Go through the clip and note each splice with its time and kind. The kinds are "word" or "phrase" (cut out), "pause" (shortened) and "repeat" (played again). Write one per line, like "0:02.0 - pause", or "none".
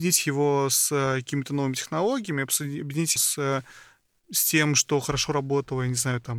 0:03.2 - word

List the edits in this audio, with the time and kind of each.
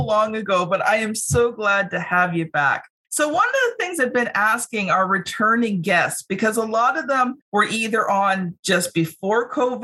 0:07.4 - pause

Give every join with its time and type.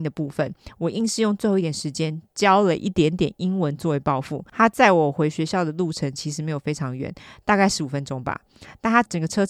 none

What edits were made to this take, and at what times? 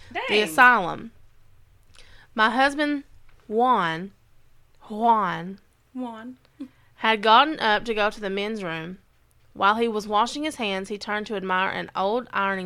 none

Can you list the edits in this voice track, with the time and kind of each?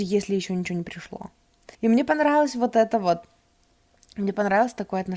0:01.7 - pause

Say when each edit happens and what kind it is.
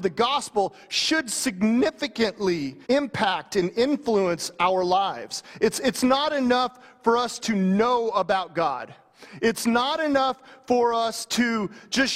0:02.8 - pause
0:07.4 - word

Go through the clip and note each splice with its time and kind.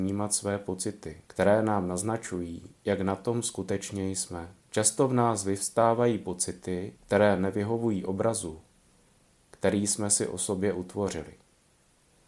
0:01.3 - pause
0:02.8 - pause
0:04.6 - pause
0:07.0 - pause

